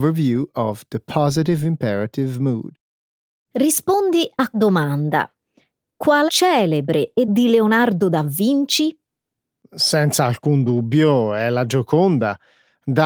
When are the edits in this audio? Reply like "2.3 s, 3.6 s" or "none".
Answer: 2.9 s, 4.5 s, 6.3 s, 7.2 s